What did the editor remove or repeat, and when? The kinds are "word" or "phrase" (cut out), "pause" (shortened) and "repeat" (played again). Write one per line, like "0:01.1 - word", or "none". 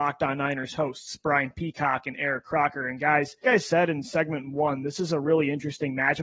0:03.4 - word